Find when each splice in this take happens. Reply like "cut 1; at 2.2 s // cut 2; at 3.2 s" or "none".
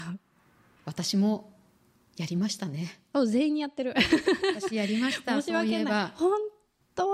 none